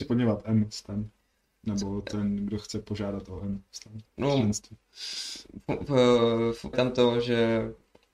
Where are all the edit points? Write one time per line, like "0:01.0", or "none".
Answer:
0:06.7